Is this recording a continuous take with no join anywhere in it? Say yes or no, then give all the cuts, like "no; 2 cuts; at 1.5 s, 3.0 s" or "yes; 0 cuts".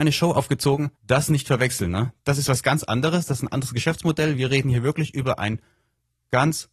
no; 1 cut; at 1.0 s